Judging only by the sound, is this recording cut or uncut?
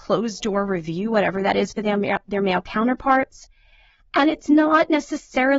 uncut